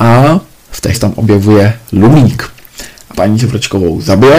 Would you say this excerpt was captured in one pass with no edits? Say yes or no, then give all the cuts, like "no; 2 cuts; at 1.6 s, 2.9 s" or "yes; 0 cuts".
no; 2 cuts; at 0.9 s, 3.1 s